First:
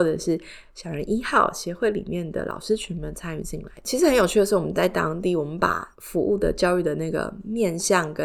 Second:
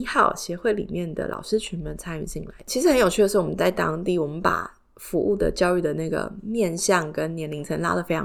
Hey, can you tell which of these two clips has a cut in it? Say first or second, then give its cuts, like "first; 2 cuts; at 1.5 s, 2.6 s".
first; 1 cut; at 5.9 s